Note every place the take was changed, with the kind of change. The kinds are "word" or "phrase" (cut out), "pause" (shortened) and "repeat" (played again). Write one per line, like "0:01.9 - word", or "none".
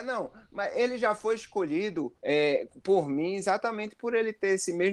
0:02.2 - pause